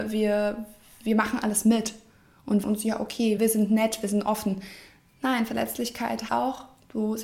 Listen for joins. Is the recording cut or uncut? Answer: cut